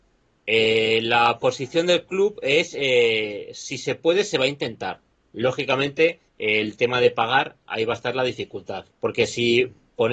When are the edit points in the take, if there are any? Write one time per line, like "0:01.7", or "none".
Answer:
0:06.3
0:08.9